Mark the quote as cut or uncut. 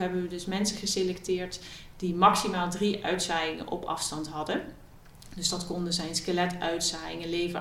uncut